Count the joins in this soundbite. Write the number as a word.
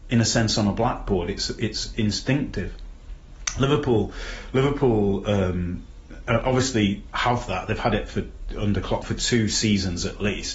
one